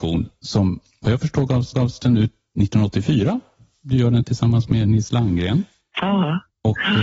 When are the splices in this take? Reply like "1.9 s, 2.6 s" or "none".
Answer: 1.7 s